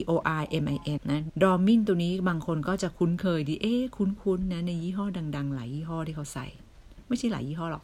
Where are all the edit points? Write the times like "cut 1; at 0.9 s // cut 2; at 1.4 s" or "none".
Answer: cut 1; at 1.0 s // cut 2; at 1.3 s